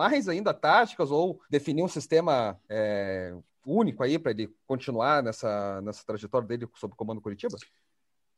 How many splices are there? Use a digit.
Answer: 2